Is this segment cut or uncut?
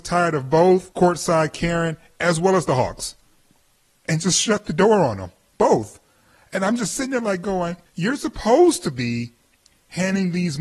cut